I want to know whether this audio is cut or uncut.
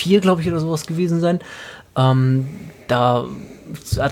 uncut